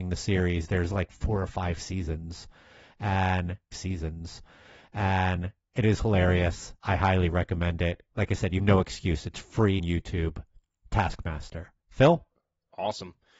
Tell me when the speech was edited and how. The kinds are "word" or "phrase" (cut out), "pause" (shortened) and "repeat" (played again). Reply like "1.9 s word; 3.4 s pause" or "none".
3.7 s repeat; 6.8 s pause; 8.1 s pause; 8.6 s word; 9.8 s word; 11.8 s pause

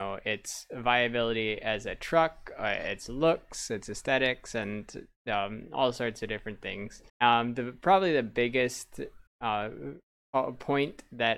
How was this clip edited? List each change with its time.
7.1 s pause; 9.3 s pause

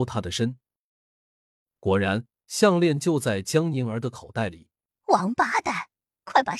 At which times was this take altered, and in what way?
4.9 s pause

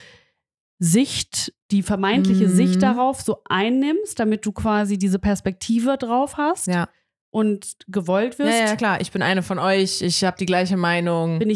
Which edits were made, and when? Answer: none

